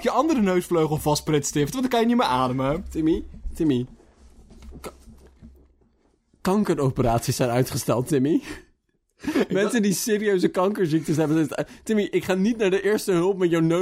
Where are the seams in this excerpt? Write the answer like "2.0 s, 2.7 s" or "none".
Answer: none